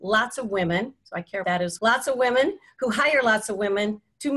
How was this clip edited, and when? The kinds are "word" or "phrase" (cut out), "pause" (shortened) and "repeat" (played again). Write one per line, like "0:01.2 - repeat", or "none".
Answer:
0:01.4 - word
0:01.8 - word